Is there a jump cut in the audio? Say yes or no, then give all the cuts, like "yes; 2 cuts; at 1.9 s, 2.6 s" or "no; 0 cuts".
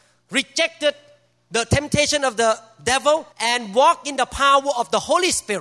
yes; 1 cut; at 3.3 s